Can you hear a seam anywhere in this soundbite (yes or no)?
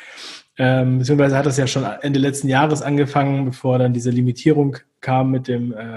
no